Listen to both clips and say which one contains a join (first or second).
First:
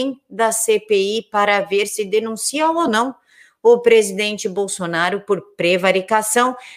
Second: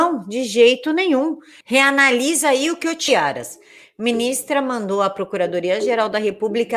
second